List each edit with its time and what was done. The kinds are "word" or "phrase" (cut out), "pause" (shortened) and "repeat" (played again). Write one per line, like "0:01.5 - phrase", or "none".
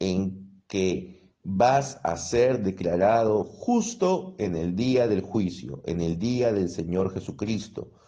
none